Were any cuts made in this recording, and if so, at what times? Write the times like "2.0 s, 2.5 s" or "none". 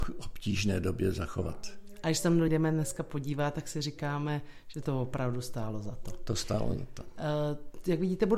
2.5 s